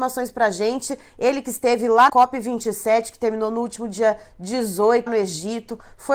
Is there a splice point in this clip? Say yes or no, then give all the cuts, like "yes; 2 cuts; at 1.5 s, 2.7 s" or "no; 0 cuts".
yes; 2 cuts; at 2.1 s, 5.1 s